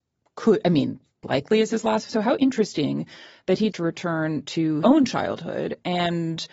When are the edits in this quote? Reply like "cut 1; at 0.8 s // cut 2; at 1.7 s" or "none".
cut 1; at 1.2 s // cut 2; at 2.1 s // cut 3; at 3.7 s // cut 4; at 4.8 s